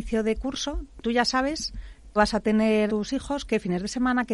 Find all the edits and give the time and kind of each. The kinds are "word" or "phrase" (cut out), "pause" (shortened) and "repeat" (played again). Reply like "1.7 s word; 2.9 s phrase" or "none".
1.0 s word; 2.2 s word; 2.9 s word